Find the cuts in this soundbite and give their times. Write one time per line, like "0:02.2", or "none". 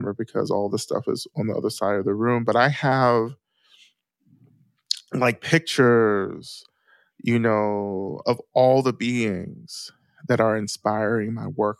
0:08.2